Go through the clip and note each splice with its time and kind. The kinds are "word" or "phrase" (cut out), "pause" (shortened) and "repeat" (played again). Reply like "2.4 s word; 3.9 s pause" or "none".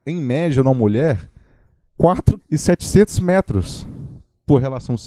2.4 s word

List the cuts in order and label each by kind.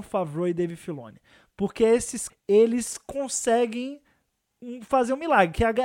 2.3 s word

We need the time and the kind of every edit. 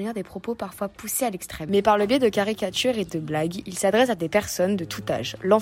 none

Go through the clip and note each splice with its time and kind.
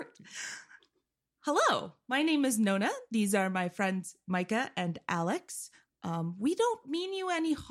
none

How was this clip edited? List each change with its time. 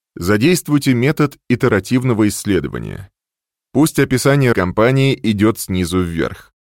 4.5 s word

